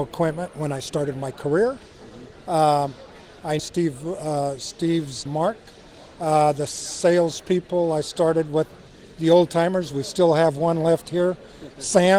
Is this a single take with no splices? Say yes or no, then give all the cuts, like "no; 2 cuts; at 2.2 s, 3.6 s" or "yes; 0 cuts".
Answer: no; 2 cuts; at 3.6 s, 5.3 s